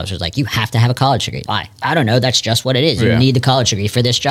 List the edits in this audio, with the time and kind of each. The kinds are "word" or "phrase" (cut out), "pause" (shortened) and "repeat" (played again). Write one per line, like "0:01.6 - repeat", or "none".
0:01.5 - word